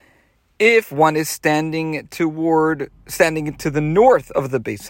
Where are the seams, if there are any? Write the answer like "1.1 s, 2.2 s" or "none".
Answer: none